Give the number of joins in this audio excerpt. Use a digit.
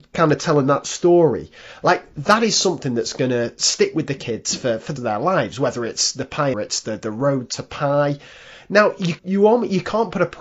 3